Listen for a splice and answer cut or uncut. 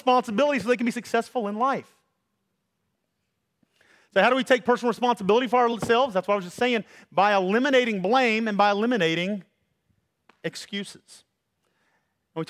uncut